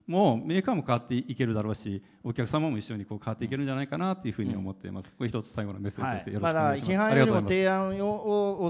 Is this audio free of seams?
yes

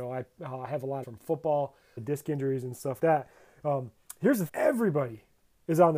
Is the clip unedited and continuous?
no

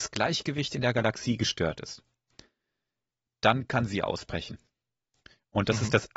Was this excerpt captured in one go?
yes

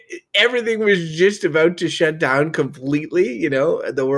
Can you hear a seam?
no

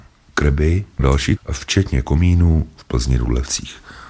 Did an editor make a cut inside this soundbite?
yes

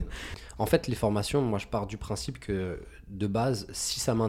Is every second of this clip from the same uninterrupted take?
yes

